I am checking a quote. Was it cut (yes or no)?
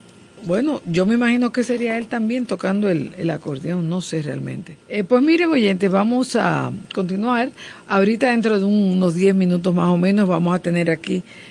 yes